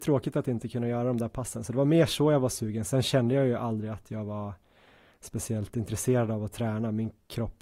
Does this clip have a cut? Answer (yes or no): no